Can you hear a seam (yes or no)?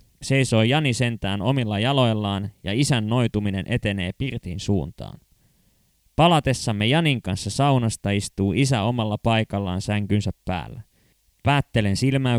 no